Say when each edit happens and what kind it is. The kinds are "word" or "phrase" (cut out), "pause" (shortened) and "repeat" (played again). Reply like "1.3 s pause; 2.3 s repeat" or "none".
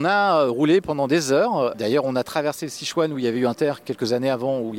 3.5 s word